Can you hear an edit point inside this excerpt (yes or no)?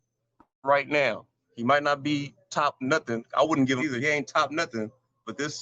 yes